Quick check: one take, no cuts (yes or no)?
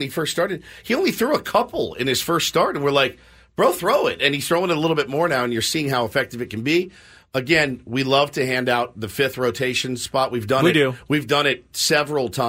yes